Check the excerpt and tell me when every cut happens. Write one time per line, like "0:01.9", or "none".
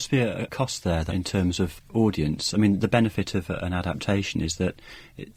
0:01.1